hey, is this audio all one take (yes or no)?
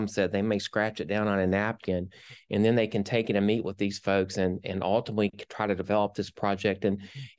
yes